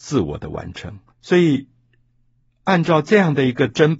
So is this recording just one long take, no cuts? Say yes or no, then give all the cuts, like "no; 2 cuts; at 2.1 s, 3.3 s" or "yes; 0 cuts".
no; 1 cut; at 1.1 s